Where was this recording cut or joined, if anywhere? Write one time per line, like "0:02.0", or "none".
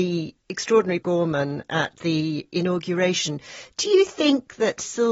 0:01.0